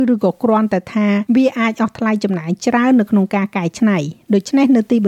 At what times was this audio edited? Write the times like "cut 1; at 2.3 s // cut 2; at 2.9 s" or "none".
cut 1; at 1.3 s

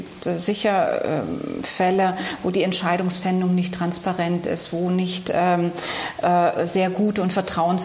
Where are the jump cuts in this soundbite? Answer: none

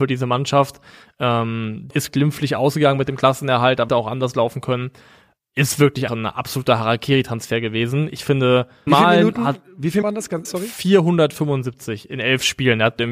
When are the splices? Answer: cut 1; at 1.9 s // cut 2; at 3.9 s // cut 3; at 6.1 s // cut 4; at 8.9 s // cut 5; at 10.0 s // cut 6; at 10.4 s

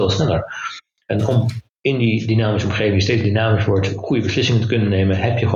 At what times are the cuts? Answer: cut 1; at 1.7 s

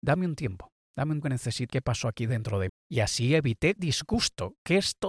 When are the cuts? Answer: cut 1; at 1.2 s // cut 2; at 1.7 s // cut 3; at 2.7 s // cut 4; at 3.8 s

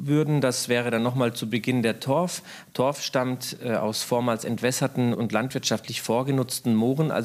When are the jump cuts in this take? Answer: cut 1; at 5.1 s

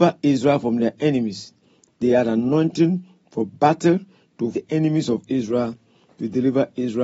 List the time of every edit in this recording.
cut 1; at 4.5 s

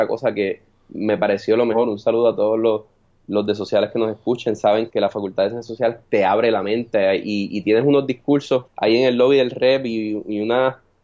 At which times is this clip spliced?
cut 1; at 4.9 s // cut 2; at 8.7 s

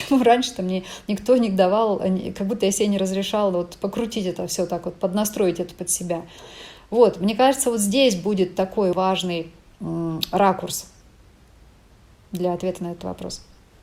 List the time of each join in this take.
cut 1; at 8.9 s

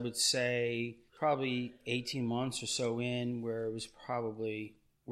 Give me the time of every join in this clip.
cut 1; at 1.1 s

